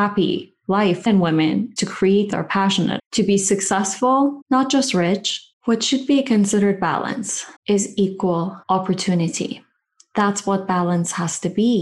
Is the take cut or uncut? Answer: cut